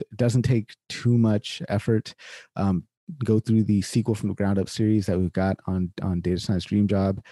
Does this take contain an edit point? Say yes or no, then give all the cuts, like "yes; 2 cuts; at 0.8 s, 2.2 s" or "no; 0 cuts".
no; 0 cuts